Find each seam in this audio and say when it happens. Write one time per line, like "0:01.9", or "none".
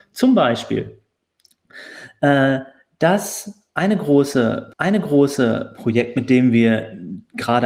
0:04.7